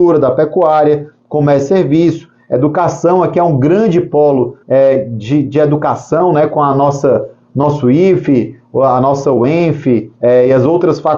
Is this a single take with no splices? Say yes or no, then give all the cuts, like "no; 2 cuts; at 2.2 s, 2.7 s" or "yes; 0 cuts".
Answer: no; 2 cuts; at 4.6 s, 10.2 s